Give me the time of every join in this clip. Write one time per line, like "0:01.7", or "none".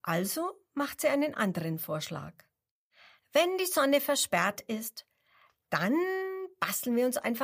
none